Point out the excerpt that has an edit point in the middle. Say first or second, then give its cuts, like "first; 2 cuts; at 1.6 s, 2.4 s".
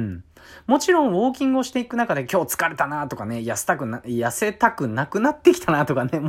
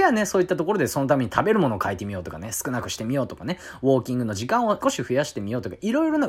second; 1 cut; at 4.8 s